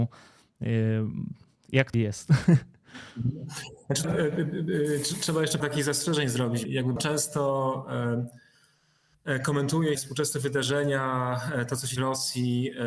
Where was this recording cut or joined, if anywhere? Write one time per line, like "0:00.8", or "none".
0:01.9
0:04.0
0:05.6
0:06.6
0:07.0
0:09.9
0:12.0